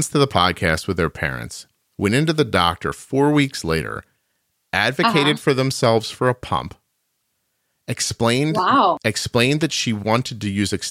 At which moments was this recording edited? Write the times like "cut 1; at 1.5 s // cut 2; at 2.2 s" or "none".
none